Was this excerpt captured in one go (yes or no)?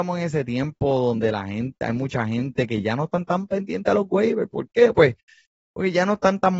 yes